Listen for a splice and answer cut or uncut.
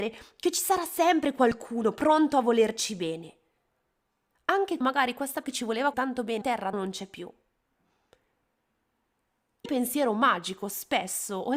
cut